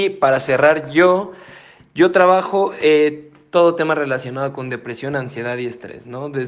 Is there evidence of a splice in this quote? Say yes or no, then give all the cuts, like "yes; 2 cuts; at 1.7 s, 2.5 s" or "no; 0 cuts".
no; 0 cuts